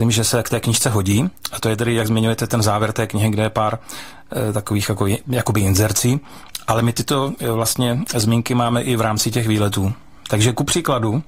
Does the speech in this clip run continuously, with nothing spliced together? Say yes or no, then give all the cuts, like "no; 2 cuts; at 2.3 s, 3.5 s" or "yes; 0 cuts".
yes; 0 cuts